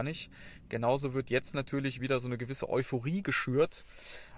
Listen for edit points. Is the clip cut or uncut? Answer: uncut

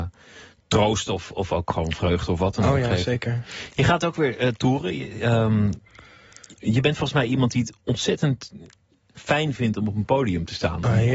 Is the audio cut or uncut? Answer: uncut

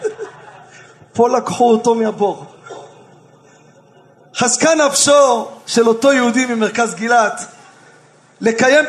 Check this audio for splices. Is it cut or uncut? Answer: uncut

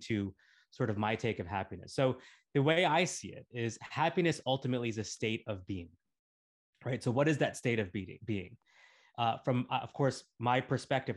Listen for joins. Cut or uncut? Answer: uncut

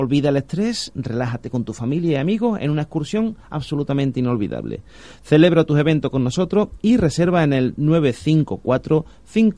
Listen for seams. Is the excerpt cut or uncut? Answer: uncut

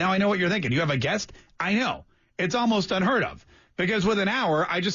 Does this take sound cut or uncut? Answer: uncut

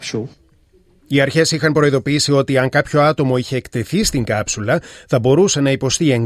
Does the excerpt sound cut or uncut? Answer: uncut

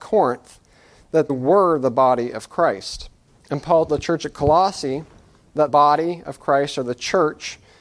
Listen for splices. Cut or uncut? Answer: cut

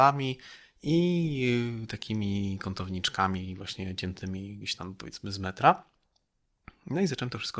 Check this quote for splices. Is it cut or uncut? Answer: uncut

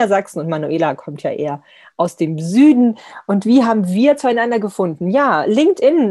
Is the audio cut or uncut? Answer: uncut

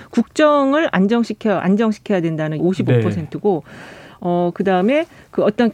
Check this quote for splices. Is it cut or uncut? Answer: cut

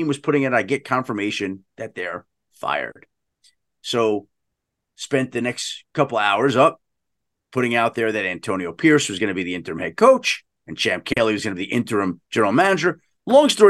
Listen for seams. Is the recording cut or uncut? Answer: uncut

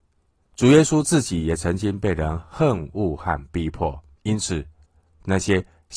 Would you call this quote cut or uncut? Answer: cut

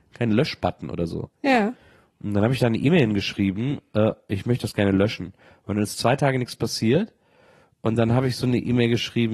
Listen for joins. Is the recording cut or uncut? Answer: uncut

